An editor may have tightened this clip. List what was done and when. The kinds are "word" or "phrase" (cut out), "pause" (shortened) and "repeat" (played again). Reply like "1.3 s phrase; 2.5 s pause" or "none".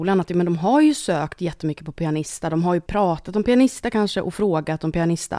2.9 s word

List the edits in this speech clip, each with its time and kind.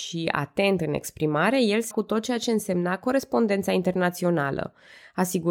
1.9 s word

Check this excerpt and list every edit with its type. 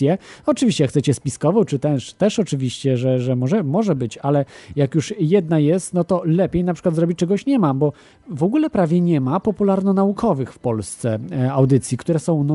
none

